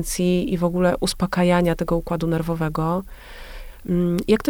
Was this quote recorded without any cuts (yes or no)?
yes